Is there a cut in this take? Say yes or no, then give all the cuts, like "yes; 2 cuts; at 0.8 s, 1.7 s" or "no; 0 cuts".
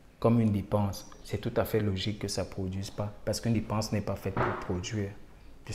no; 0 cuts